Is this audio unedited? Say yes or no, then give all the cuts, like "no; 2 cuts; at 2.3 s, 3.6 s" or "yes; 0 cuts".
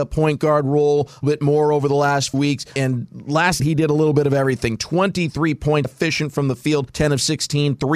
no; 4 cuts; at 1.2 s, 2.3 s, 3.6 s, 5.8 s